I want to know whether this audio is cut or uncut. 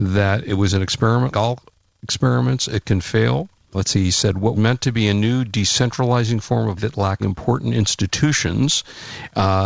cut